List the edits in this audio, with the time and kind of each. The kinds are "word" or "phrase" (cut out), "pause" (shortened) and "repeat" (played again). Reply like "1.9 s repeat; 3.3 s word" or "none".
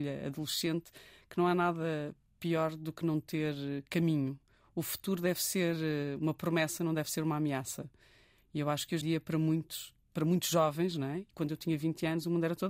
9.0 s word